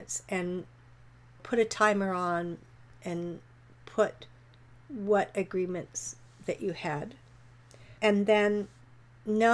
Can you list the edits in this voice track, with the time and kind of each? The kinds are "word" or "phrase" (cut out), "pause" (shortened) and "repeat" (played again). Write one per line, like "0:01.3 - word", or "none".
0:08.0 - pause